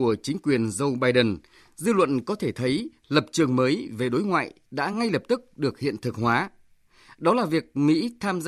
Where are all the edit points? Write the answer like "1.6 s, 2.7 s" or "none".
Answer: none